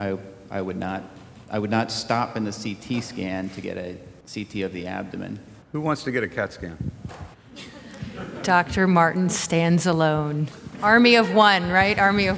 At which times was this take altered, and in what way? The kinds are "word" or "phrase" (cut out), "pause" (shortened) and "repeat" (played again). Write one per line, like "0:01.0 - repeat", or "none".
0:04.2 - pause
0:05.6 - pause
0:07.3 - pause